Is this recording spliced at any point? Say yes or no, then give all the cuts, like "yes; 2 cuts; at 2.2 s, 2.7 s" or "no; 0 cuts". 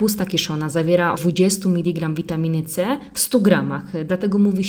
yes; 1 cut; at 1.2 s